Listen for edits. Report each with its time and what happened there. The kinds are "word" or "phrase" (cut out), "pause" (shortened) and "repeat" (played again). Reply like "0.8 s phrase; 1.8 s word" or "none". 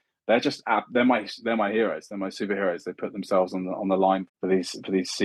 4.3 s word